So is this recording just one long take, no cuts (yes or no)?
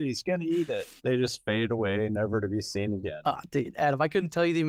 no